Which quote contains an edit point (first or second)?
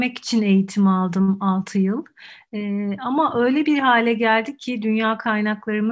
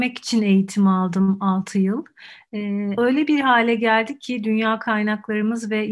second